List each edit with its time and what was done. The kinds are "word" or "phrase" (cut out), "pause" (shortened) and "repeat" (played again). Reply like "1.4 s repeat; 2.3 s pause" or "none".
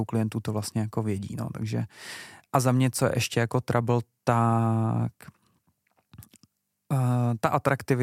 none